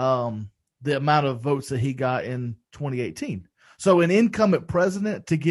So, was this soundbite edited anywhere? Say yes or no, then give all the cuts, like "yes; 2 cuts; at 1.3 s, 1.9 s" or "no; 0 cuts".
yes; 1 cut; at 2.6 s